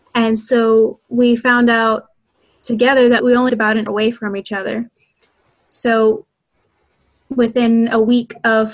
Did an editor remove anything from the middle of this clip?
yes; 3 cuts; at 3.2 s, 3.5 s, 3.9 s

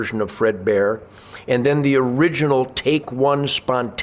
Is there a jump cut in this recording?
no; 0 cuts

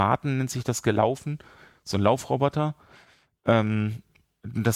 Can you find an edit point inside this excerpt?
no; 0 cuts

